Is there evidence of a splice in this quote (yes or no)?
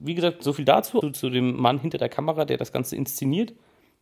yes